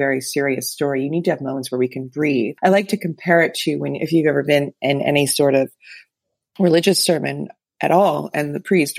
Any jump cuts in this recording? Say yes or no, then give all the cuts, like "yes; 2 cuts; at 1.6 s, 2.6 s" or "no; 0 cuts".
no; 0 cuts